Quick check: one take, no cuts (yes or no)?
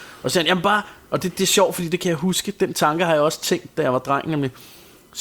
yes